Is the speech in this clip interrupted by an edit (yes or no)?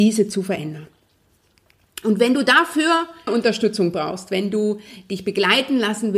yes